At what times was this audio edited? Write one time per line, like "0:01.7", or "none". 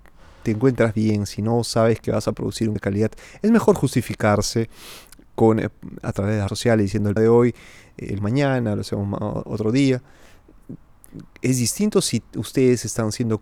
0:02.8
0:06.5
0:07.2
0:08.2